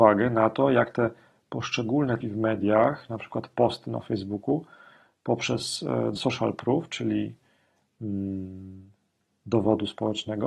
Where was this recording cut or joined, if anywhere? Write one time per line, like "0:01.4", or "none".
0:02.2
0:06.2